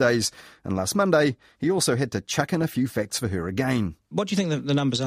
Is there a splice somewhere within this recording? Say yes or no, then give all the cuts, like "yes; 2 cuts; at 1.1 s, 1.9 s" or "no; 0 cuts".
no; 0 cuts